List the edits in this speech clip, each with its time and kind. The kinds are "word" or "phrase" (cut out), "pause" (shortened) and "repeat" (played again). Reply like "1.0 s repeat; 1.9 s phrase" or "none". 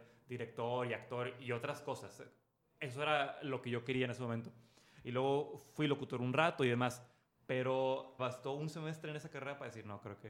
8.2 s word

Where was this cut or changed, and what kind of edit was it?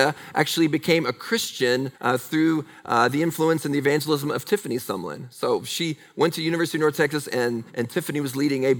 1.9 s pause; 7.7 s pause

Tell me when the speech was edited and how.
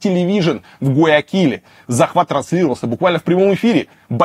none

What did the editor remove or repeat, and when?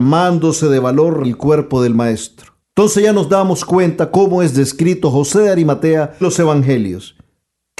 1.2 s word; 2.6 s pause; 6.2 s word

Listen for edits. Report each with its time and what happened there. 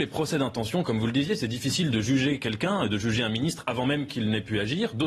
none

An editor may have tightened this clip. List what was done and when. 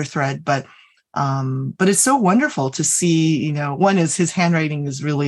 none

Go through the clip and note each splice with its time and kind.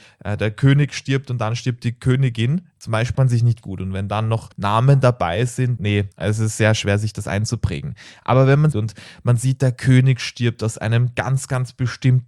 3.1 s phrase; 3.6 s word; 4.5 s pause; 5.8 s word; 6.1 s pause; 8.7 s phrase

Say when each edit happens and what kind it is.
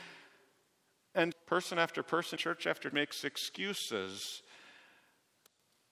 1.3 s word; 2.4 s word; 2.9 s word

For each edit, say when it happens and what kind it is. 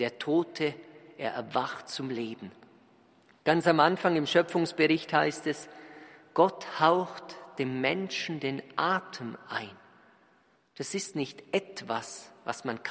none

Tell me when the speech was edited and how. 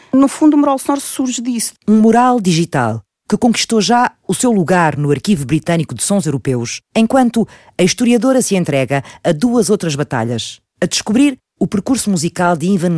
6.8 s pause; 10.7 s pause

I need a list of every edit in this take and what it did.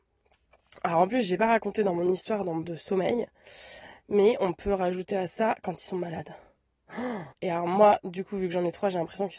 2.6 s word; 7.3 s pause

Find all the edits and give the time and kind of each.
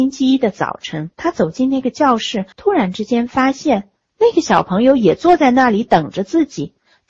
1.1 s pause; 2.5 s pause; 4.1 s word

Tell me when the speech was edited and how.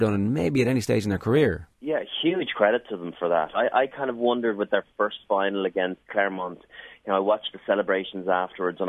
1.7 s pause; 6.0 s pause

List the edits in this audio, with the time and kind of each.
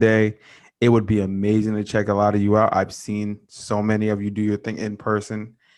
3.4 s pause

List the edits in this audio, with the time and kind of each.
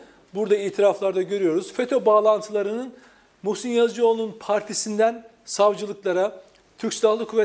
none

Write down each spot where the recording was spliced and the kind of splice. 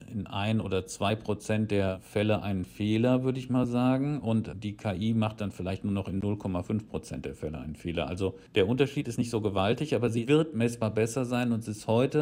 8.5 s pause

